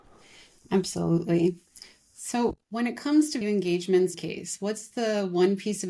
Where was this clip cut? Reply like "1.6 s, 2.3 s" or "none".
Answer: 2.6 s, 3.4 s, 4.1 s